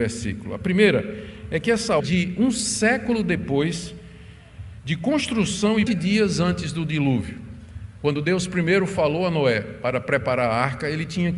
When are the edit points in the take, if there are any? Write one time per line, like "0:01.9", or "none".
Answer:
0:02.0
0:05.9

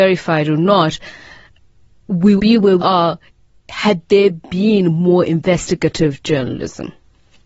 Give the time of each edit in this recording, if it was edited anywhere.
0:02.4
0:02.8

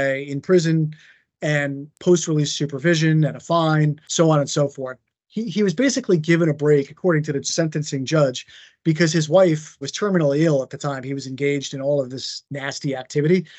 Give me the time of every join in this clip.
none

